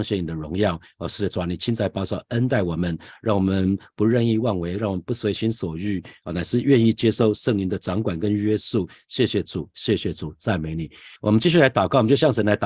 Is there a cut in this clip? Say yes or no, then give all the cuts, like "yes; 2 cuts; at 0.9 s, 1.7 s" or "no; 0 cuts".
yes; 1 cut; at 11.2 s